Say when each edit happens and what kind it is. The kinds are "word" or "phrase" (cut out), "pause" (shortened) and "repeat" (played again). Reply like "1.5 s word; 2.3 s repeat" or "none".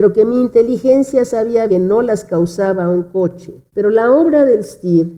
1.7 s word; 3.7 s pause